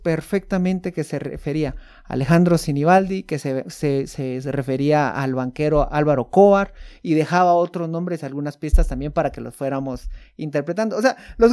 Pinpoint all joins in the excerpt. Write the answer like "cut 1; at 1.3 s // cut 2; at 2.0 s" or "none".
none